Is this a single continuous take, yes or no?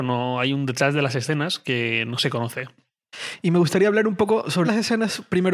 no